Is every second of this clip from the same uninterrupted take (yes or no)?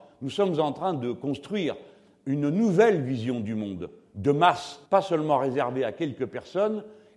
no